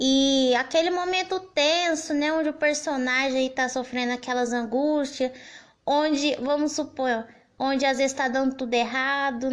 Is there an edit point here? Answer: no; 0 cuts

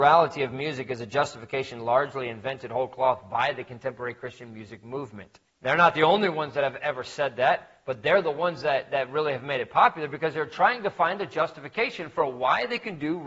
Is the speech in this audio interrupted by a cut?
yes; 1 cut; at 5.5 s

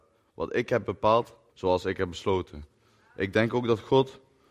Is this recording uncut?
no; 1 cut; at 1.5 s

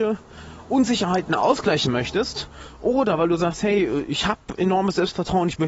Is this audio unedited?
yes; 0 cuts

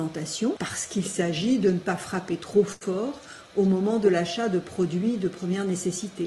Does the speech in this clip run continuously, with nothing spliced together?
yes; 0 cuts

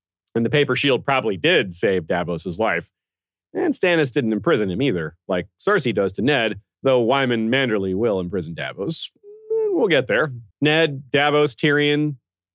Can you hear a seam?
yes; 2 cuts; at 6.7 s, 10.5 s

